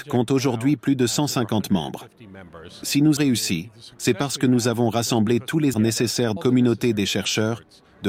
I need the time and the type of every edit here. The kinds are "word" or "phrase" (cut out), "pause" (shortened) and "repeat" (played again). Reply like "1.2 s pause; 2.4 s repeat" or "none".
3.2 s word; 5.7 s word; 6.4 s word